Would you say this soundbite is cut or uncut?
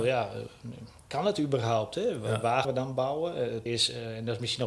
cut